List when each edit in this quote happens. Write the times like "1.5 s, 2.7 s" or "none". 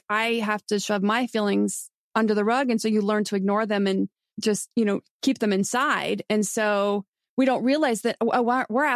none